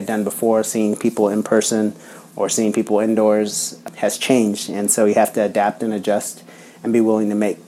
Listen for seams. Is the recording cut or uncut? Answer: uncut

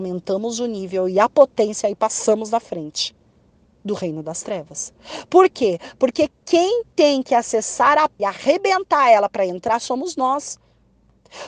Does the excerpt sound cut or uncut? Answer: cut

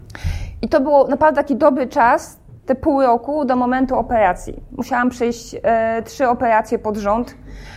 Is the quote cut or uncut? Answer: cut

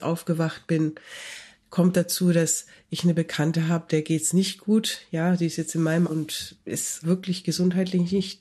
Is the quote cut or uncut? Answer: cut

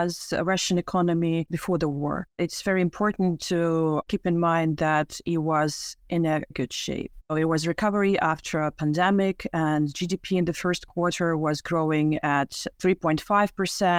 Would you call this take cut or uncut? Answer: cut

